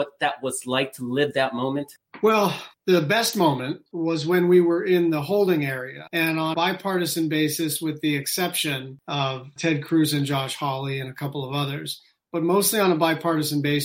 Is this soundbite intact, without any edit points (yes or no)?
no